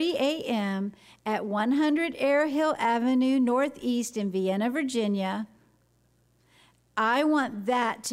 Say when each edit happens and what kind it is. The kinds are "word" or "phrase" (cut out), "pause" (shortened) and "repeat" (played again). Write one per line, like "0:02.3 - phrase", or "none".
none